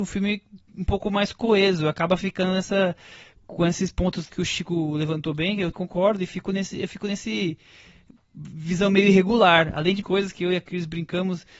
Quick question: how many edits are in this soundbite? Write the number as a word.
three